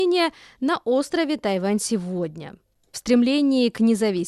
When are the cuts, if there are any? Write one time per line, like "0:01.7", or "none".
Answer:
0:02.9